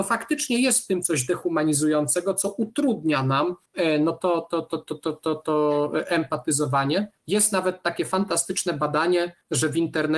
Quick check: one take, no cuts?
yes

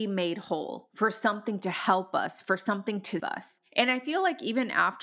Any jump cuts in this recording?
yes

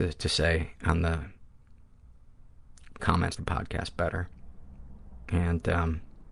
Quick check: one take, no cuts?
no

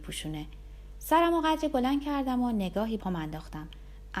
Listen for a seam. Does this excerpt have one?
yes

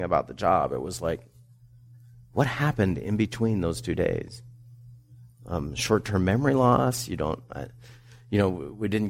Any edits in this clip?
no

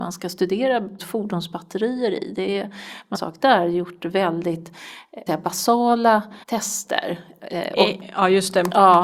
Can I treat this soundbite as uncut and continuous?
no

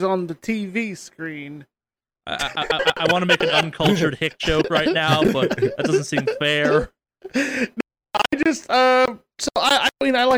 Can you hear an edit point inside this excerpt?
yes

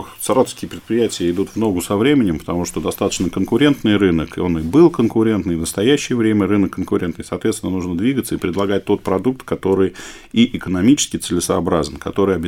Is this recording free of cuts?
yes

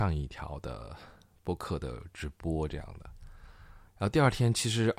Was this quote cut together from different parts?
yes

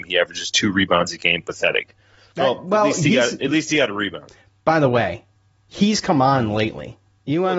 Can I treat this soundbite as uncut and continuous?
yes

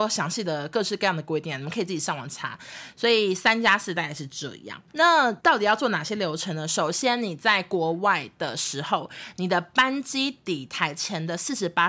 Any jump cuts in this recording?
yes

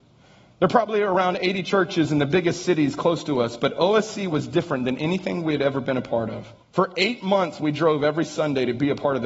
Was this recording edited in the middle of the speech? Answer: yes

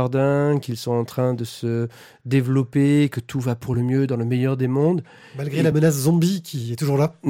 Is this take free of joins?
yes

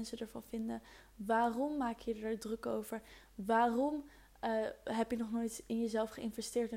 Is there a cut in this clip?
no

